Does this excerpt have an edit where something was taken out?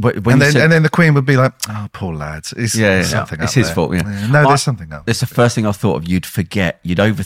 no; 0 cuts

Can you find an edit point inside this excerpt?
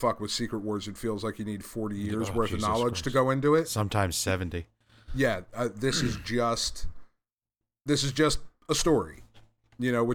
no; 0 cuts

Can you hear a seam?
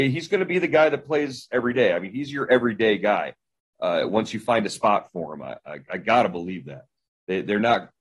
no; 0 cuts

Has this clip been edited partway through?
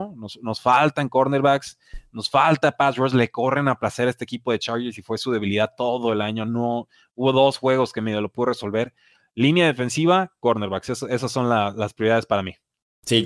no; 0 cuts

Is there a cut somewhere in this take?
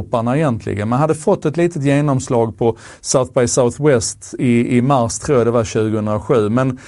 no; 0 cuts

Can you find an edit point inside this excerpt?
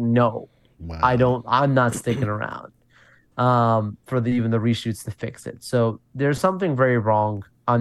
no; 0 cuts

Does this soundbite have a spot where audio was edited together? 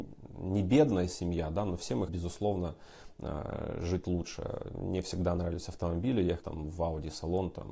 yes; 2 cuts; at 2.1 s, 6.4 s

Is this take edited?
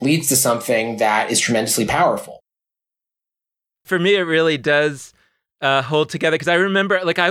no; 0 cuts

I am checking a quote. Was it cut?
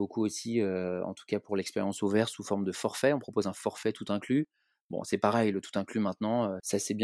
no; 0 cuts

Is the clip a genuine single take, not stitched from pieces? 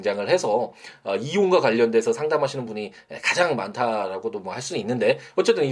yes; 0 cuts

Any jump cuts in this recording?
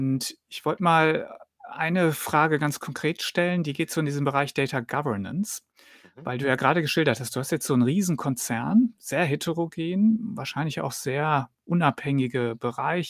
no; 0 cuts

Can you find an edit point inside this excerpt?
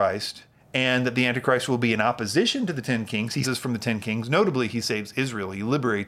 yes; 1 cut; at 3.4 s

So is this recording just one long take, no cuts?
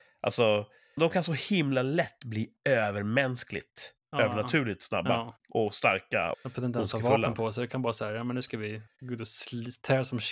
no; 3 cuts; at 1.0 s, 5.4 s, 6.3 s

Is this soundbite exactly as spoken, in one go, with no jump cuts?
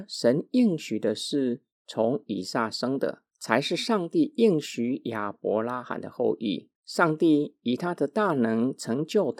no; 2 cuts; at 3.3 s, 6.7 s

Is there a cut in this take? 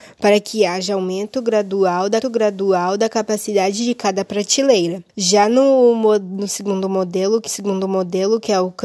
yes; 3 cuts; at 2.2 s, 5.1 s, 7.5 s

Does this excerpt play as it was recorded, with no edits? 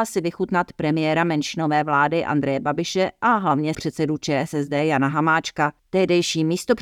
no; 2 cuts; at 3.7 s, 5.8 s

